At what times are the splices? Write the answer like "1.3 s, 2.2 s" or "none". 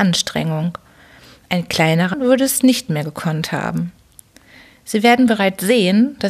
2.1 s